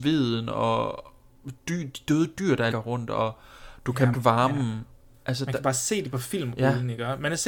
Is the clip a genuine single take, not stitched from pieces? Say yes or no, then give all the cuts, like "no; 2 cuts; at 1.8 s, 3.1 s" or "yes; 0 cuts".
no; 3 cuts; at 1.6 s, 2.7 s, 4.1 s